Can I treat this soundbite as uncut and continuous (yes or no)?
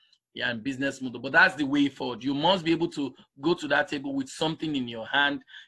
yes